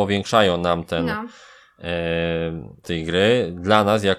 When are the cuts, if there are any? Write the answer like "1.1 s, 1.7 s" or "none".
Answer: 2.8 s